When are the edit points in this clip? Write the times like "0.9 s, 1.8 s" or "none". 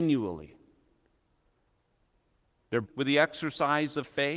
2.8 s

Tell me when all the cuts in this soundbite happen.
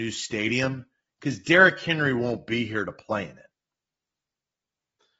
none

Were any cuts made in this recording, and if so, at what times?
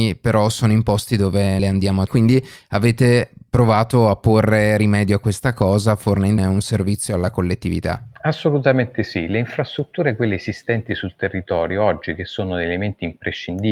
1.6 s, 2.1 s, 6.4 s, 8.2 s

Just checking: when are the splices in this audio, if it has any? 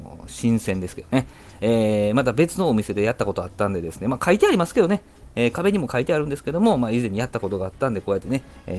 none

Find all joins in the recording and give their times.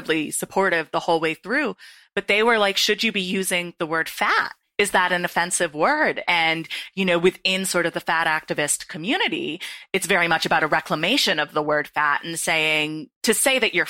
none

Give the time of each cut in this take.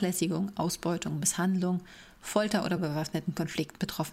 none

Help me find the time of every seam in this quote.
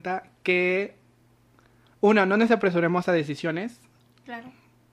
none

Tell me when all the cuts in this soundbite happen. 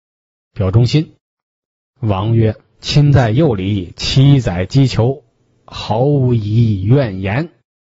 none

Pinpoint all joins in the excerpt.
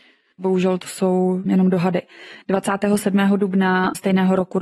1.5 s

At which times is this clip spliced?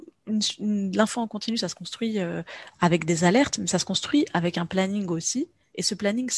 none

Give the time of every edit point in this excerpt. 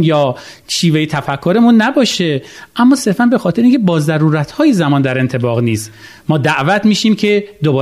none

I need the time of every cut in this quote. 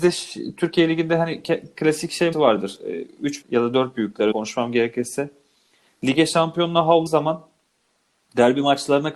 2.3 s, 3.4 s, 4.3 s, 7.1 s

